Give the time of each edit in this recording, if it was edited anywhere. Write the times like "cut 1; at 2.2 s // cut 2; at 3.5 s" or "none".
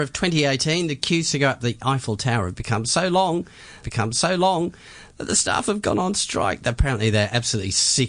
cut 1; at 3.8 s